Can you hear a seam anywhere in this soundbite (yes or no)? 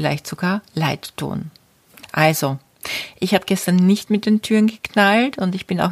no